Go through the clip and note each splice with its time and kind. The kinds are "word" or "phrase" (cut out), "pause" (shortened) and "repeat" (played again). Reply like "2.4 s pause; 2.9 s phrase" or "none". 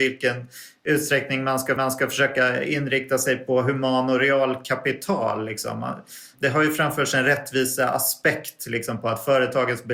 1.8 s repeat